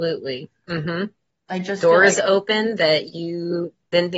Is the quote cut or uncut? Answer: uncut